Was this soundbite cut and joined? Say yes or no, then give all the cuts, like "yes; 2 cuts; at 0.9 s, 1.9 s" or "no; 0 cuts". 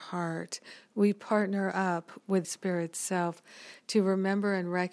yes; 1 cut; at 2.4 s